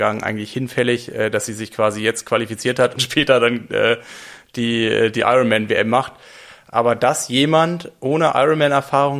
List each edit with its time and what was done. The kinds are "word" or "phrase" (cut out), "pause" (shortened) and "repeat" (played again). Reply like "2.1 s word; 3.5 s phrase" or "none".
3.0 s phrase